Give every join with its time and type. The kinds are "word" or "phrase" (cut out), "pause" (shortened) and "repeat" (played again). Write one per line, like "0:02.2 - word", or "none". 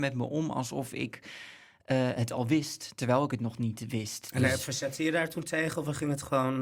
none